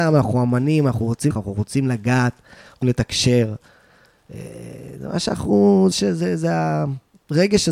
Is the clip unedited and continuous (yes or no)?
no